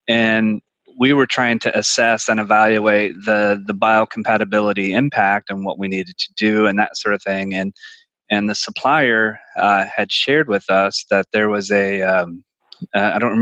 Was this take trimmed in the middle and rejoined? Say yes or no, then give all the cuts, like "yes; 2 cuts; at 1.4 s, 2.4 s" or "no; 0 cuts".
no; 0 cuts